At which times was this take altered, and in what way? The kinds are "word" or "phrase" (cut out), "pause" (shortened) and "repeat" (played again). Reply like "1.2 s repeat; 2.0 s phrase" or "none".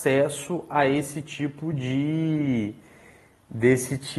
none